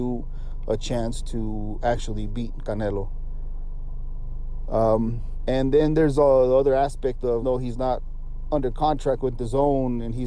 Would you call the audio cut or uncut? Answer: cut